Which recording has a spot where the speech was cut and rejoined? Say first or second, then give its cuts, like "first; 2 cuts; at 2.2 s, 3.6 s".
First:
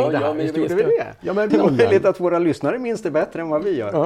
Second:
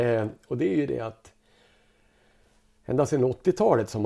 first; 1 cut; at 1.5 s